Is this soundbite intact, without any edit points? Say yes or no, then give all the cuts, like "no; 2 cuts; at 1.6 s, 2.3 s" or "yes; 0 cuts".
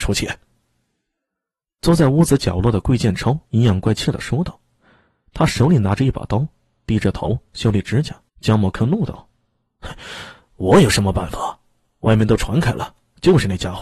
no; 2 cuts; at 3.5 s, 8.3 s